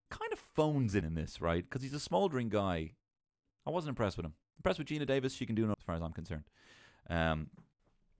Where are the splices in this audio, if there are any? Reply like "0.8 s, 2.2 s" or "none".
1.0 s, 5.7 s